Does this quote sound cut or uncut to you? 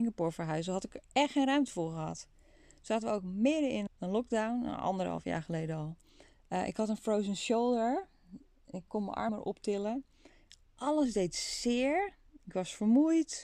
cut